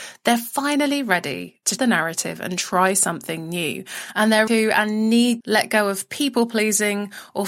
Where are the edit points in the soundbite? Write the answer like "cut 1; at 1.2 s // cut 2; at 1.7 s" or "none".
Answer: cut 1; at 1.8 s // cut 2; at 4.5 s // cut 3; at 5.4 s